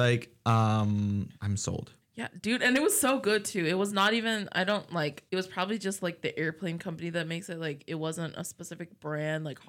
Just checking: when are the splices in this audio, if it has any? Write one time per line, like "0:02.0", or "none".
0:01.4
0:02.0
0:05.3